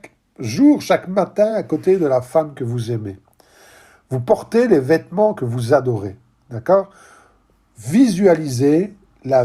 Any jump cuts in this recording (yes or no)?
no